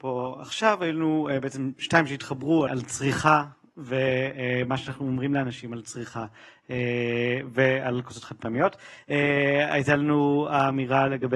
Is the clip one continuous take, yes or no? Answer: no